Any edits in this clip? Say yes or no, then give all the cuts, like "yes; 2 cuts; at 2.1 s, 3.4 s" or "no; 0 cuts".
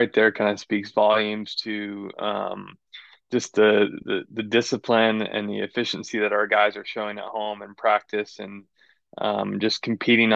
no; 0 cuts